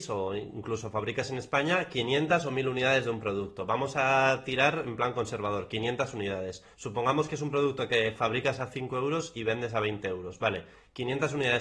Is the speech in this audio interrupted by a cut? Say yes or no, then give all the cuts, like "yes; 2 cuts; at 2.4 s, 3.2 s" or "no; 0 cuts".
yes; 1 cut; at 6.7 s